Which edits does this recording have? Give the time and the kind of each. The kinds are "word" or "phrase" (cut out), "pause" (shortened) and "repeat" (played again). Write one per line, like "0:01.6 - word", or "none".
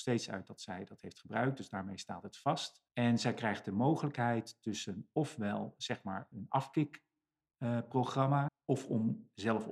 0:02.9 - pause
0:06.3 - word
0:08.5 - word